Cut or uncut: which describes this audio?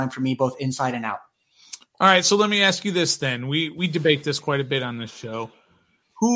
uncut